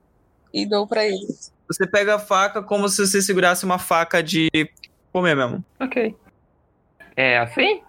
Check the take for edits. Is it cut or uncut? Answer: cut